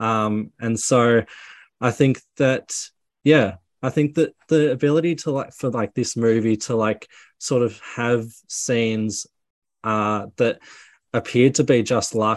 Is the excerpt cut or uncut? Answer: uncut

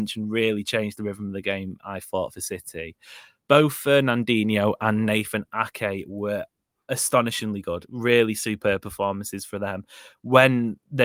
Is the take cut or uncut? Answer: uncut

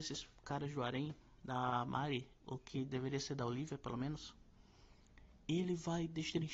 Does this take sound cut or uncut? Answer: uncut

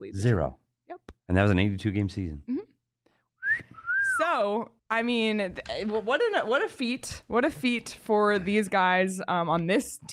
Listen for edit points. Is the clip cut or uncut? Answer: cut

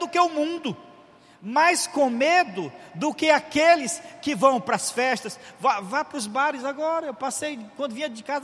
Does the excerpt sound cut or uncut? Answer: uncut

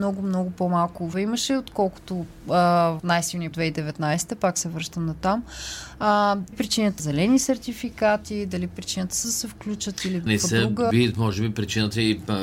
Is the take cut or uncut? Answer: cut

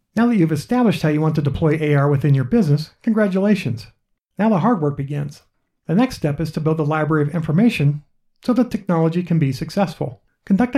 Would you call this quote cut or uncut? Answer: uncut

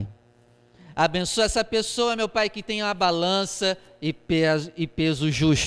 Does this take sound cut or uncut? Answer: uncut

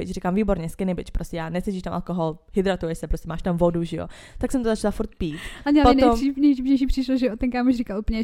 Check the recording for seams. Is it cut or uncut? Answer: uncut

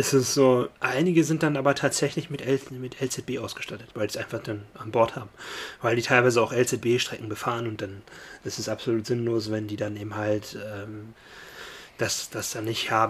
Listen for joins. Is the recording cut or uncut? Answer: uncut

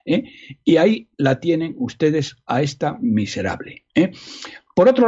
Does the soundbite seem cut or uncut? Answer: uncut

